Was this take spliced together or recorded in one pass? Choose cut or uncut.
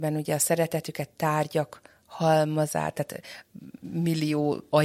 uncut